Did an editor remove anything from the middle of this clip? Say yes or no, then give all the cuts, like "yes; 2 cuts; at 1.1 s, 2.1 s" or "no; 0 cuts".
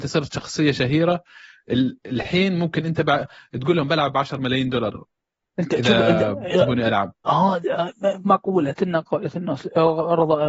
no; 0 cuts